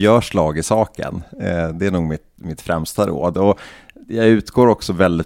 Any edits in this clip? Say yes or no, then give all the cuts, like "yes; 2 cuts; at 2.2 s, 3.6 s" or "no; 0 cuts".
no; 0 cuts